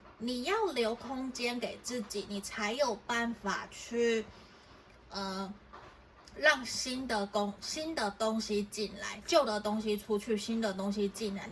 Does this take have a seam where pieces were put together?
no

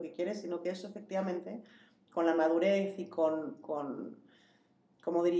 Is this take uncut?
yes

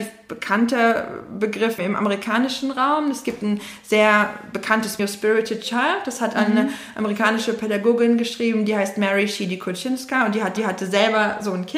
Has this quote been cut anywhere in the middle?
yes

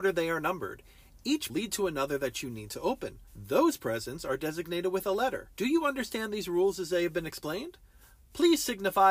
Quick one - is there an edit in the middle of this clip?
yes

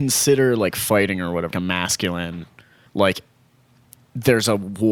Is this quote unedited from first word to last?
no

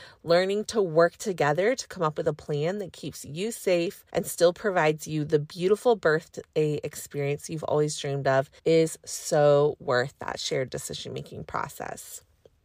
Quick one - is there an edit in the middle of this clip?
yes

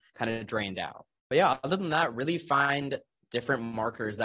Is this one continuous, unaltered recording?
yes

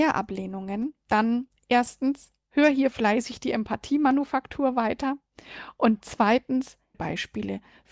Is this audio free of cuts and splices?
no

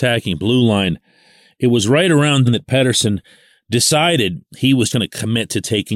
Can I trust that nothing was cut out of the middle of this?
no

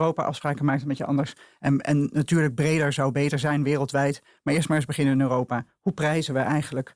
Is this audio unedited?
yes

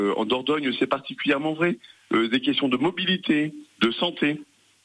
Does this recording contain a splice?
no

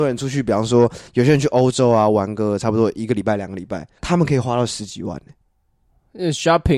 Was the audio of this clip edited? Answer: yes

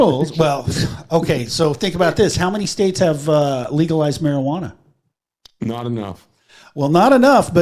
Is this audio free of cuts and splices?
yes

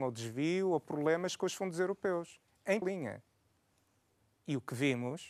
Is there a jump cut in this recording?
yes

